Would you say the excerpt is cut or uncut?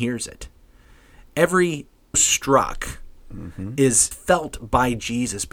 cut